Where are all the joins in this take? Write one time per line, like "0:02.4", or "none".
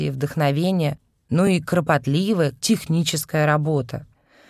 none